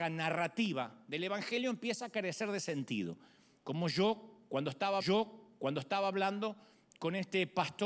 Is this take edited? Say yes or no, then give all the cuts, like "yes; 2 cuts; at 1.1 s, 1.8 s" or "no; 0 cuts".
yes; 1 cut; at 5.0 s